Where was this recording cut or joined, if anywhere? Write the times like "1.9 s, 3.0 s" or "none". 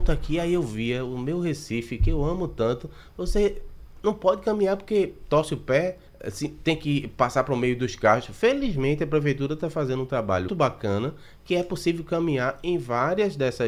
6.1 s, 10.5 s